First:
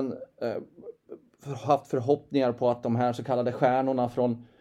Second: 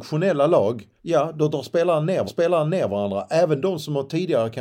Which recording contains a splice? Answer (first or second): second